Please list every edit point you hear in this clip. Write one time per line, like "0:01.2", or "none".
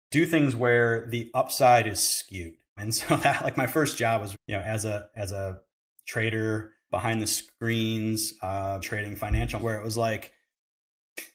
0:02.8
0:04.3
0:06.9
0:08.8
0:09.6